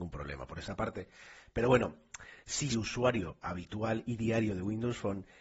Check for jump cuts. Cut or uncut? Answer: cut